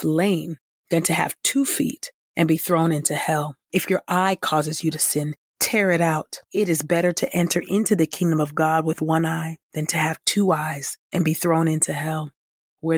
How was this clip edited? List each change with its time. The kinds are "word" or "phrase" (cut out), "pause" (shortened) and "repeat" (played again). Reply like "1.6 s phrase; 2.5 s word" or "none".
3.6 s pause; 6.4 s pause; 9.6 s pause; 11.0 s pause